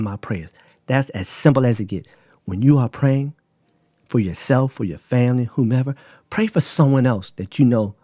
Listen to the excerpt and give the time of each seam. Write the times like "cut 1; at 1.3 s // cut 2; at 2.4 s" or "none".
none